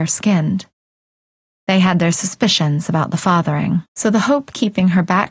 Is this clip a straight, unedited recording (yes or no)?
no